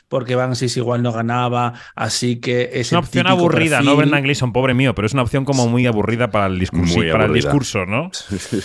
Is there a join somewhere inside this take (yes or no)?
no